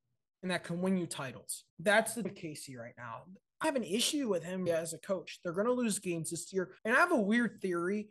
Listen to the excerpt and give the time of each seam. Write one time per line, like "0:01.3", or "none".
0:01.7
0:02.2
0:03.6
0:04.7
0:06.8